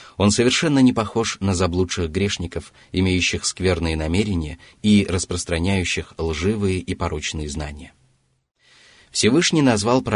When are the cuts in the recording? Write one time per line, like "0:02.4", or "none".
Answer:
none